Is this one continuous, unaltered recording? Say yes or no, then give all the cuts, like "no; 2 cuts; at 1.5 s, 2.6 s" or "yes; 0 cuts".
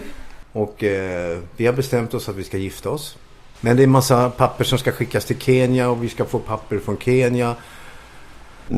yes; 0 cuts